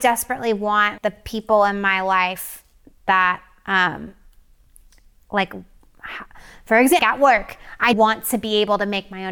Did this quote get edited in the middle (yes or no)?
yes